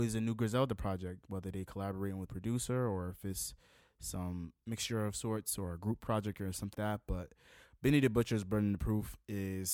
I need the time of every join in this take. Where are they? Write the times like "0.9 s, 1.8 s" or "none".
2.3 s, 4.6 s, 6.7 s